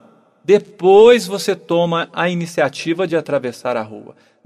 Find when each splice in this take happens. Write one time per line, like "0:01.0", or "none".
none